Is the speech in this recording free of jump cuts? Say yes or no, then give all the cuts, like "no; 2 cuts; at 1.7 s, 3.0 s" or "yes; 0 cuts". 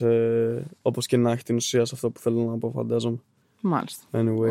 yes; 0 cuts